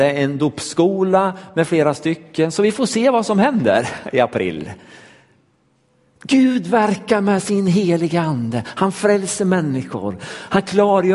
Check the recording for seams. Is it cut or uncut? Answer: uncut